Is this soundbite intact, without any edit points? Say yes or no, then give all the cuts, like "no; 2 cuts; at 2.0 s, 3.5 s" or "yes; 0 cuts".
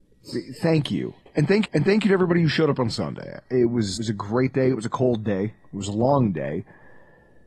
no; 2 cuts; at 1.6 s, 4.0 s